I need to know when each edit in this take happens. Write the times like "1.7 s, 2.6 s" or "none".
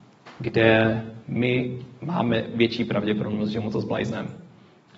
1.2 s